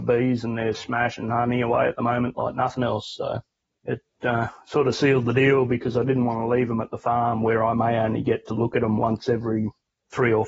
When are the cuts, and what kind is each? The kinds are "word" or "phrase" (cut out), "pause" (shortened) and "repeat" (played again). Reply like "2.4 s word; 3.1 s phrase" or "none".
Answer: none